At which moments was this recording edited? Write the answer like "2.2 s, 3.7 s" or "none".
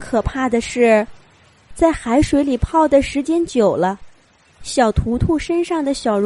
none